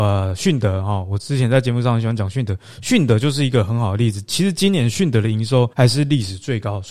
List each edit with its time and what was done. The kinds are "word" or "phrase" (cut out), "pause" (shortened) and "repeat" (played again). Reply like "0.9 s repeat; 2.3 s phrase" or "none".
5.7 s pause